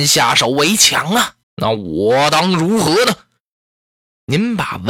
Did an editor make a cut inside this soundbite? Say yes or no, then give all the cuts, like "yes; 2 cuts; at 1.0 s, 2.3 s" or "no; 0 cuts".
yes; 1 cut; at 1.4 s